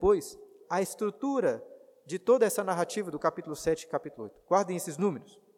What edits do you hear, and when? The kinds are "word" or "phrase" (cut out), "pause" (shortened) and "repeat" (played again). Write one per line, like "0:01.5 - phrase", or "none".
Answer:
none